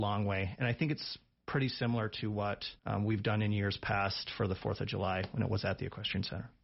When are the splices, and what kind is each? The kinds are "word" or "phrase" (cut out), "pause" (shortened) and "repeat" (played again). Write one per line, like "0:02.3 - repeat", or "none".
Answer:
0:02.8 - pause